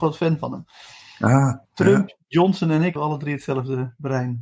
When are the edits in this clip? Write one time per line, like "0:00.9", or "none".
0:01.6
0:03.0